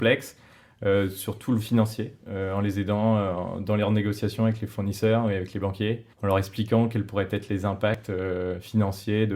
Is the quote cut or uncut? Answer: cut